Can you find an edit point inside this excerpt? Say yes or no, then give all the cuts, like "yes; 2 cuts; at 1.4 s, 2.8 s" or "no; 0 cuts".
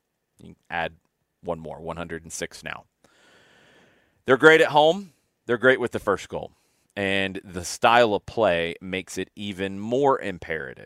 no; 0 cuts